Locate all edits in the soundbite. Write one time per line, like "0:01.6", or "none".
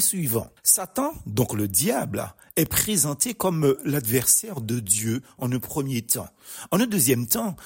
none